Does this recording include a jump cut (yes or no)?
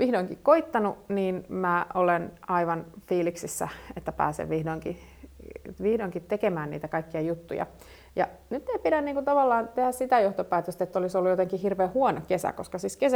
no